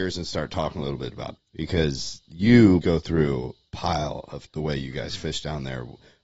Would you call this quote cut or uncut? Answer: cut